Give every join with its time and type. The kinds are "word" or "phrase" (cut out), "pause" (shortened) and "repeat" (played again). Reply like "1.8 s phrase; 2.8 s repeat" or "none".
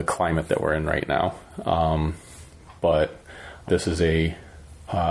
3.7 s phrase